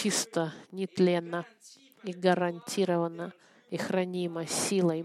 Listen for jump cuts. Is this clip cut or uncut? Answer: uncut